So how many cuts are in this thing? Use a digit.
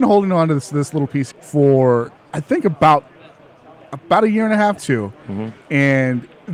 2